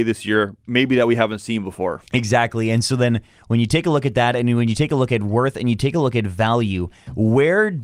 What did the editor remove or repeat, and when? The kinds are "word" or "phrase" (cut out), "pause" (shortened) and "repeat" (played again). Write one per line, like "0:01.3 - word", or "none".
0:02.1 - pause